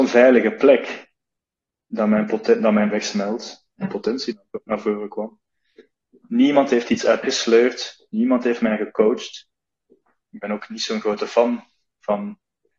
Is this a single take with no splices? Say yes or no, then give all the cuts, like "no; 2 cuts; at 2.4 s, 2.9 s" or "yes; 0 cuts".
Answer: no; 3 cuts; at 2.9 s, 3.8 s, 7.2 s